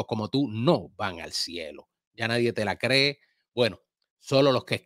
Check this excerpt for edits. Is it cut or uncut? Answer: uncut